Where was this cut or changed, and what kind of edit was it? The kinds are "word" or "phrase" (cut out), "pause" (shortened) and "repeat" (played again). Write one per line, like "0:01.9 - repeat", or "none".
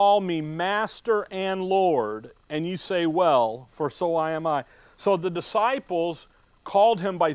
none